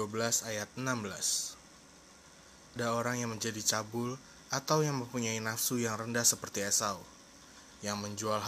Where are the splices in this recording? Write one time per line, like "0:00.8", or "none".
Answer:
0:02.8

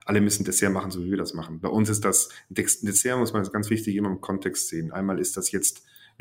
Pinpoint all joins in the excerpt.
none

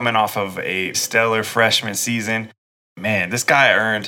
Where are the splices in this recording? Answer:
0:00.9

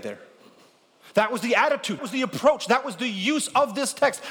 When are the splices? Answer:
0:02.0

